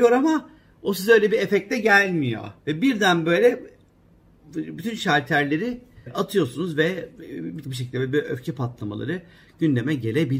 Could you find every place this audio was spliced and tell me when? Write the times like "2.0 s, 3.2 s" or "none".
2.6 s, 6.1 s, 7.6 s

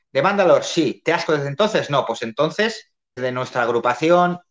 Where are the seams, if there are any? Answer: 1.3 s, 3.2 s

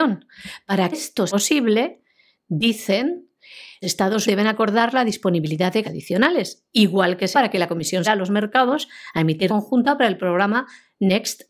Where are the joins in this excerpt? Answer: 0.9 s, 1.3 s, 3.8 s, 4.2 s, 5.8 s, 7.3 s, 8.1 s, 9.5 s

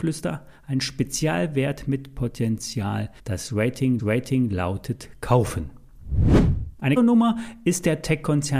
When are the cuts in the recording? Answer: 3.2 s, 4.0 s, 7.0 s

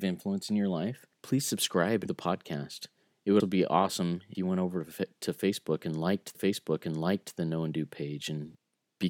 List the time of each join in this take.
1.1 s, 2.1 s, 3.0 s, 3.4 s, 4.3 s, 6.3 s

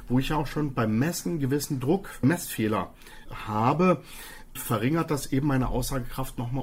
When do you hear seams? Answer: 2.2 s, 3.3 s, 4.6 s

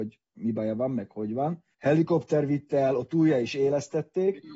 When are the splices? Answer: 1.7 s

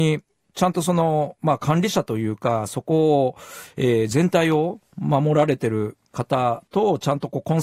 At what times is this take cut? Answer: 6.7 s

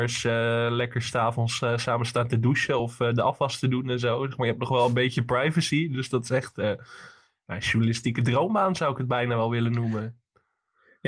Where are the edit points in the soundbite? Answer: none

